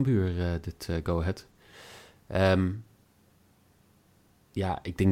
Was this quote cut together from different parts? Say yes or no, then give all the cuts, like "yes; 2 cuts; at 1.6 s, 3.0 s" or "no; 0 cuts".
no; 0 cuts